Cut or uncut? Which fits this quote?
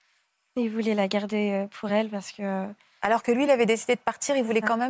uncut